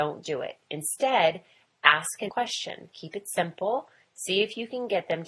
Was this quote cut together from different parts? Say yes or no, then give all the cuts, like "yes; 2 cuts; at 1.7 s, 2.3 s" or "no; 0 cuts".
yes; 1 cut; at 2.3 s